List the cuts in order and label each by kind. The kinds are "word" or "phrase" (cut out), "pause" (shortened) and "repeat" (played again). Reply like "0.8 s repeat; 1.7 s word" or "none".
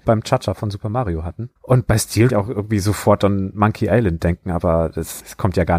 1.6 s pause; 2.3 s phrase